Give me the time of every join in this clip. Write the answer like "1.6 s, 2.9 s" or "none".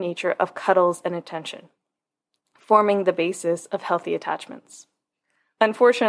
none